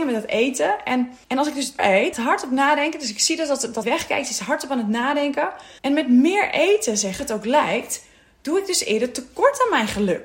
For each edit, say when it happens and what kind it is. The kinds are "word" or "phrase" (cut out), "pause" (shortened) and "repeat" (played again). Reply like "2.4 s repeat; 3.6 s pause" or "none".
1.2 s pause; 1.8 s word; 2.1 s phrase; 3.8 s word; 5.8 s pause; 7.2 s phrase